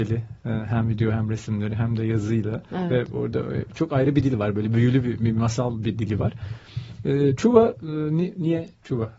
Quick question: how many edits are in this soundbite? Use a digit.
0